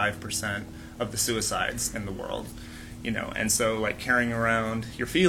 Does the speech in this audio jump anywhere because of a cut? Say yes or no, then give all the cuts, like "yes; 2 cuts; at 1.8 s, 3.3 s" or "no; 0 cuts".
no; 0 cuts